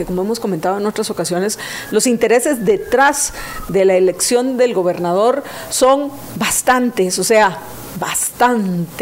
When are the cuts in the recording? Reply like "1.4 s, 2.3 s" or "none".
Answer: none